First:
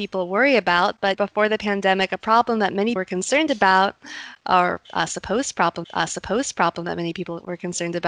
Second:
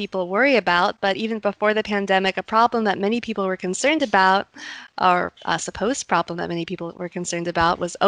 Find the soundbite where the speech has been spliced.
first; 3 cuts; at 1.1 s, 3.0 s, 5.8 s

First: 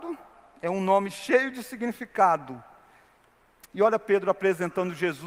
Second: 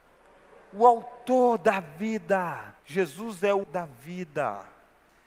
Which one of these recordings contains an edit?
second; 2 cuts; at 2.8 s, 3.6 s

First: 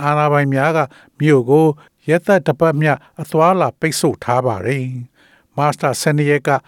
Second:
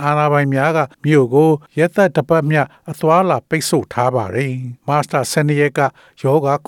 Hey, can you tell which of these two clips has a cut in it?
second; 3 cuts; at 0.9 s, 1.7 s, 4.8 s

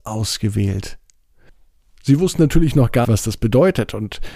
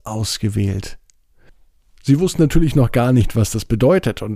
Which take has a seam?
first; 1 cut; at 3.0 s

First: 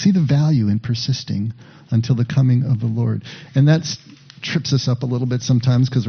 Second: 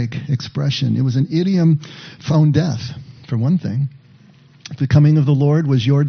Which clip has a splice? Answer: second; 1 cut; at 2.3 s

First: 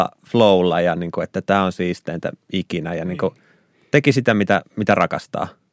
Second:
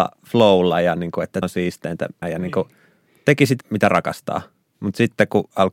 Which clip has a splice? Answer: second; 3 cuts; at 1.4 s, 2.2 s, 3.6 s

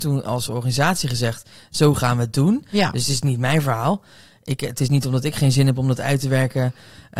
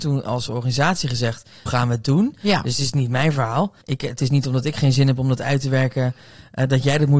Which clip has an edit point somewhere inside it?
second; 2 cuts; at 1.7 s, 3.8 s

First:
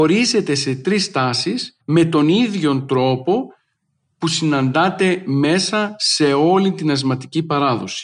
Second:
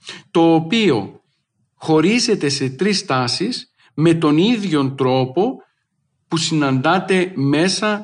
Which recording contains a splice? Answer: first; 1 cut; at 1.8 s

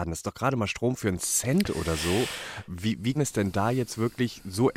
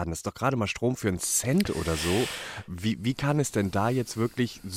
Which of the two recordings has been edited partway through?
first; 1 cut; at 3.1 s

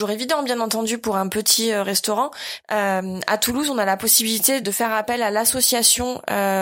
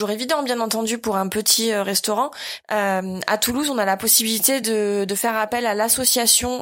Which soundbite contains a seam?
first; 1 cut; at 4.6 s

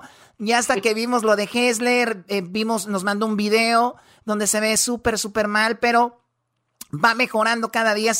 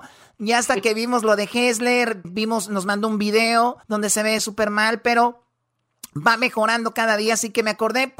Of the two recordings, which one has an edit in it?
second; 3 cuts; at 2.2 s, 3.8 s, 4.4 s

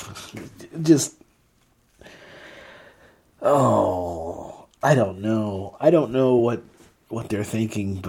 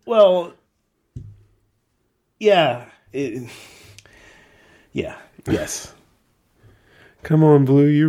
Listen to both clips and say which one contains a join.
second; 1 cut; at 3.1 s

